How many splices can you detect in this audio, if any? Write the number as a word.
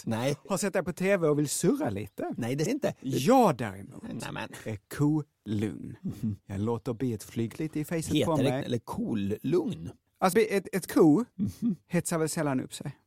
five